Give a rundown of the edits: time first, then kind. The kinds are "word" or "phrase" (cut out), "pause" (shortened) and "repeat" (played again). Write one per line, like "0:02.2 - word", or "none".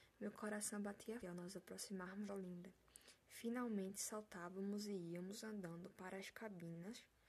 0:01.2 - word
0:02.3 - word